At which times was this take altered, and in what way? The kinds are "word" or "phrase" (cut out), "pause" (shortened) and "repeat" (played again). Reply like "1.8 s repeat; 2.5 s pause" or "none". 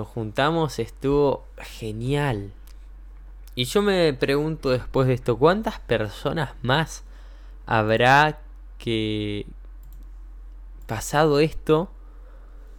none